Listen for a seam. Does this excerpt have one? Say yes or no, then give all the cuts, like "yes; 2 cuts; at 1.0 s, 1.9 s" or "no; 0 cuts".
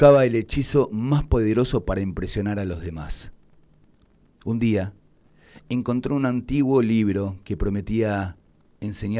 no; 0 cuts